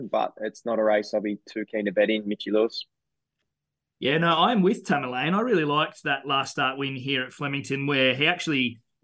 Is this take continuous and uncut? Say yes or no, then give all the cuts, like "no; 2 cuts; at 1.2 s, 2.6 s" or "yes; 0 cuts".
yes; 0 cuts